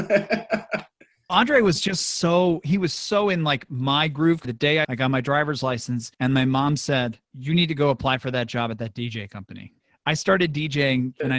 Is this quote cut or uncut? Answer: cut